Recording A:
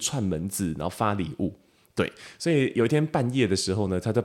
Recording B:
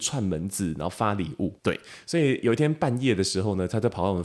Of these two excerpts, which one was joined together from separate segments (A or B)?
B